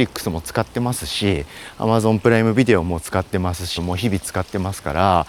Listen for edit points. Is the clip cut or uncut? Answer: cut